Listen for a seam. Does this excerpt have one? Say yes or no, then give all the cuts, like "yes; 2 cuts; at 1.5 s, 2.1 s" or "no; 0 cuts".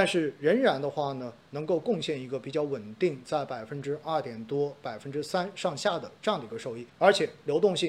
yes; 1 cut; at 6.9 s